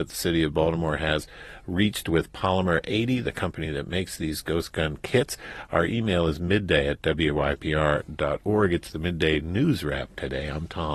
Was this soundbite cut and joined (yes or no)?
no